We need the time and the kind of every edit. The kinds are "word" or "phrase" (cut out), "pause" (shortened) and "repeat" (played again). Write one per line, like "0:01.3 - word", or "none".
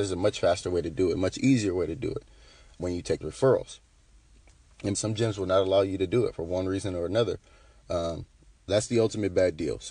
0:02.8 - word
0:03.2 - word
0:04.9 - phrase
0:08.7 - word